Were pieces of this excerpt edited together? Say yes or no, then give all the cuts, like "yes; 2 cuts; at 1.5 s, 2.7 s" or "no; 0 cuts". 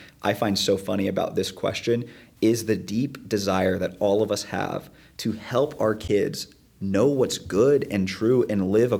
no; 0 cuts